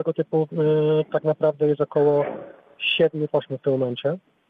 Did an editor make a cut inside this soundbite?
yes; 1 cut; at 3.3 s

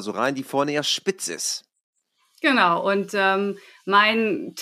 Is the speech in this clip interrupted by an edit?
no; 0 cuts

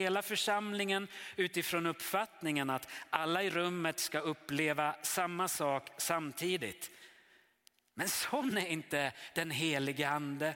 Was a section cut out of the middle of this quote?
no; 0 cuts

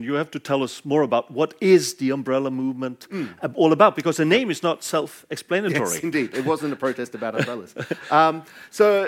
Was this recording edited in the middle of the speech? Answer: no; 0 cuts

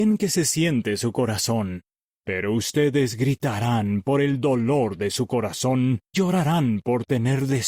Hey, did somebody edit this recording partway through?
yes; 1 cut; at 6.1 s

